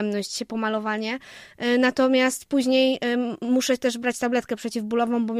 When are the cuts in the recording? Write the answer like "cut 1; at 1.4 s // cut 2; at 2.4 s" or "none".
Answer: none